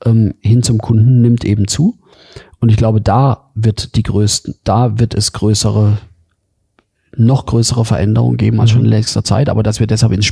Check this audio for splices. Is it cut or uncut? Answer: uncut